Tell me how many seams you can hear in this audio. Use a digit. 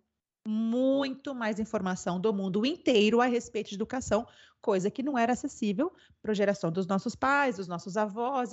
0